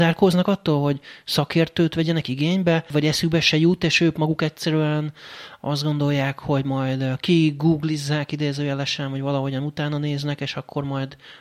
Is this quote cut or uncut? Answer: uncut